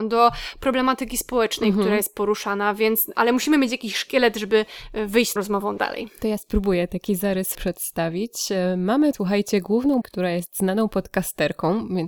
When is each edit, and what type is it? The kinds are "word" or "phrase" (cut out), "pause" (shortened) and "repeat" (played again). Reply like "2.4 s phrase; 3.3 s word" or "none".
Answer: 5.4 s word; 7.5 s word; 9.1 s word; 10.0 s word

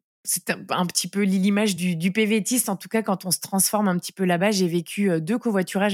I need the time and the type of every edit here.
none

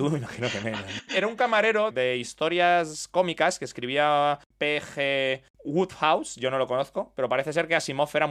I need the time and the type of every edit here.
none

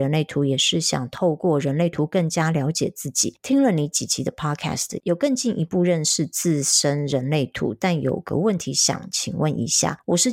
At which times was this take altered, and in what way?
none

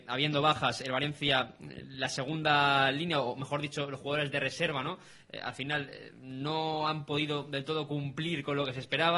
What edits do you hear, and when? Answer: none

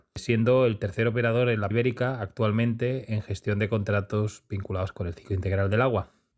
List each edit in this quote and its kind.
1.7 s word

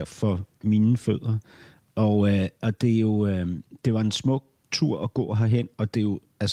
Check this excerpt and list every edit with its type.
none

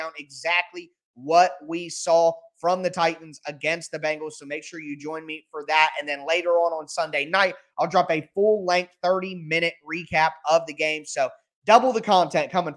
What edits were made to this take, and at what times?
none

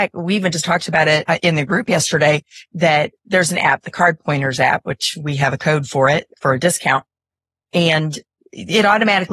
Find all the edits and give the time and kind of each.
none

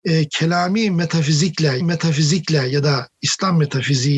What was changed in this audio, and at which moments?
1.8 s repeat

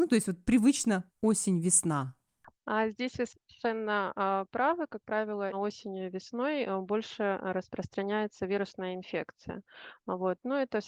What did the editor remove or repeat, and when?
1.1 s pause; 5.5 s word

